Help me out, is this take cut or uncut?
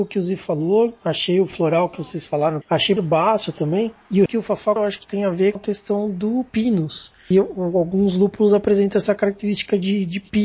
cut